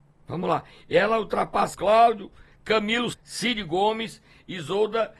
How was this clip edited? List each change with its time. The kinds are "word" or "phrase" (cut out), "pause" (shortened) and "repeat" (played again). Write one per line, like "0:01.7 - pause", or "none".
0:01.7 - word
0:03.1 - word